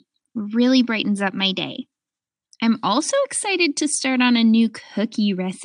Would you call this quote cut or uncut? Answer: uncut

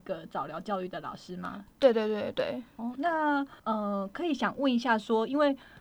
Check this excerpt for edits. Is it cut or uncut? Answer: cut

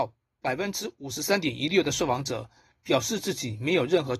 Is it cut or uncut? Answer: uncut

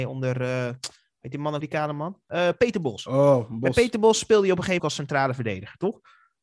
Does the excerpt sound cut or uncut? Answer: cut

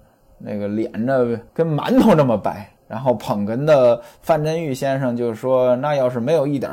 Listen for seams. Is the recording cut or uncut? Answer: cut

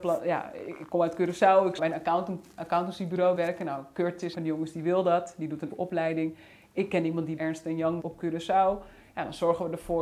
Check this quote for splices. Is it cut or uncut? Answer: cut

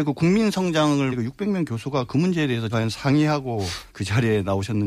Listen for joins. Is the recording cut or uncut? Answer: cut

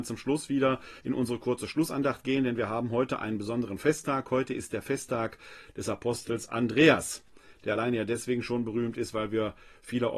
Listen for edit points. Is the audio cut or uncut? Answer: cut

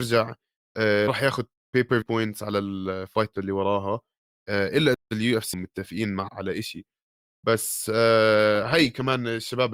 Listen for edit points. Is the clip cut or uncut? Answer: cut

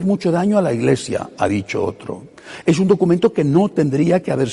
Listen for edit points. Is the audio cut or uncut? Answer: uncut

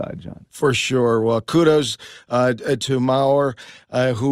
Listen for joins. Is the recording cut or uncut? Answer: uncut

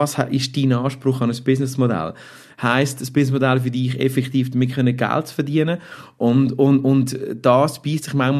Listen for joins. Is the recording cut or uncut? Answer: uncut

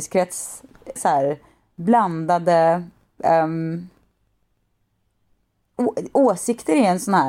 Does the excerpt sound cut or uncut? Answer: cut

